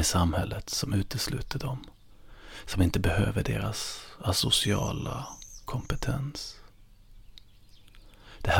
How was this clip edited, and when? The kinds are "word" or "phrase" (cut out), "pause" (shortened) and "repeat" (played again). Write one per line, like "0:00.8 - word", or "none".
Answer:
none